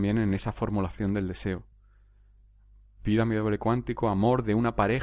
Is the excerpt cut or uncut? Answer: uncut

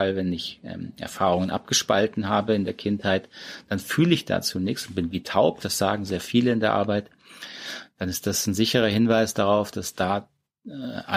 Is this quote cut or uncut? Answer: uncut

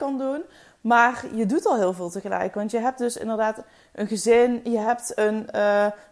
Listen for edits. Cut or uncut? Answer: uncut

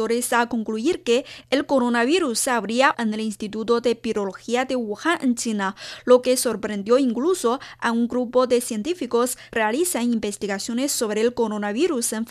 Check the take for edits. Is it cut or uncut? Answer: cut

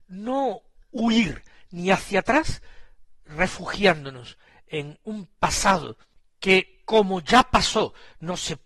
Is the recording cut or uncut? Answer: uncut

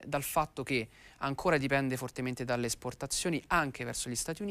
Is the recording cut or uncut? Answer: uncut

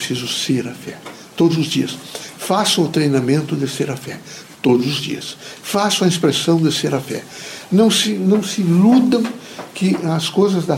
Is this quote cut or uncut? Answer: uncut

